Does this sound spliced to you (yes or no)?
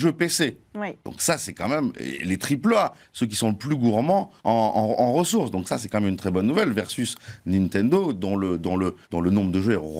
yes